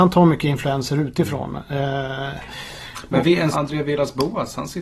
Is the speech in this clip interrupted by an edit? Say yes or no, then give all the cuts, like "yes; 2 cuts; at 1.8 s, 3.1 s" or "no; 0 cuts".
yes; 1 cut; at 3.5 s